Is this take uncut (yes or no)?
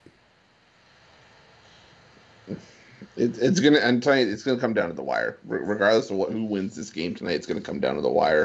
yes